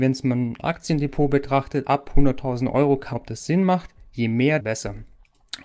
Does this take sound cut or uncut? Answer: cut